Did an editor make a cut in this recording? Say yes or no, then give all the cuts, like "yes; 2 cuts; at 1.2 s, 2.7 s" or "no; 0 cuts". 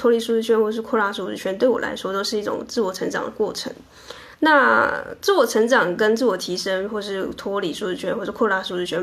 yes; 1 cut; at 4.3 s